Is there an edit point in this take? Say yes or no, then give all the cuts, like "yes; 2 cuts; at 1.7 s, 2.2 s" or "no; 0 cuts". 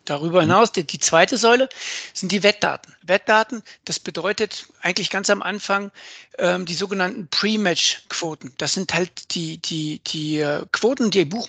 yes; 1 cut; at 3.0 s